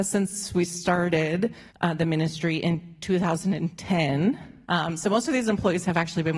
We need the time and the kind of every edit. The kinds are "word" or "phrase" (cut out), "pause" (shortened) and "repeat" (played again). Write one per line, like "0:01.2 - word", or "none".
0:01.7 - pause
0:04.6 - pause